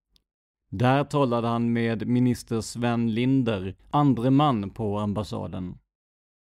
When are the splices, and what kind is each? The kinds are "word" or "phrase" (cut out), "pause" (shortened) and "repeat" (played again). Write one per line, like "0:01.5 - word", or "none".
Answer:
0:03.8 - pause